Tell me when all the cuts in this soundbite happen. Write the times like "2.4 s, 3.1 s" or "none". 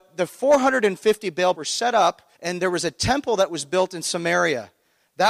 1.5 s, 2.3 s